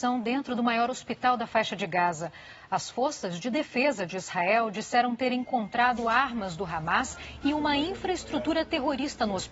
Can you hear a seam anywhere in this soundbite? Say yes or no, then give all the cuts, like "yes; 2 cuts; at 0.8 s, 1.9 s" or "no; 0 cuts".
no; 0 cuts